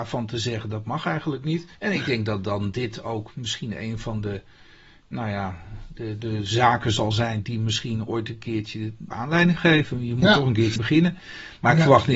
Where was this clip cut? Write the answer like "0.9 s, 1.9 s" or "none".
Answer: 1.7 s, 6.2 s, 9.1 s, 10.8 s